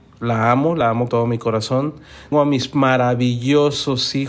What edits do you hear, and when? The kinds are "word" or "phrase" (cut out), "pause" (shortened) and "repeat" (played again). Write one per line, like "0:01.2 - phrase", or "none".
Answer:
0:01.1 - word
0:02.3 - word